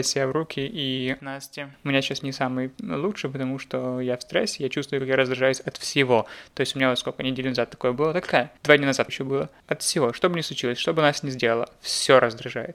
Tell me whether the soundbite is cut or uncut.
cut